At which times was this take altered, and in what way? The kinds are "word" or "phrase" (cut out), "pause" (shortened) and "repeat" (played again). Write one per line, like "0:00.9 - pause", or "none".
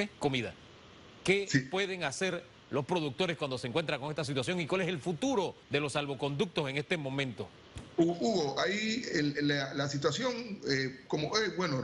0:05.6 - pause